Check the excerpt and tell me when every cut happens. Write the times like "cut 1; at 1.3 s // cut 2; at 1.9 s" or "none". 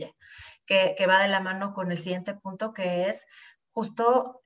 none